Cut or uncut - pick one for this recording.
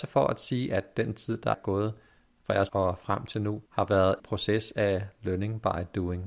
cut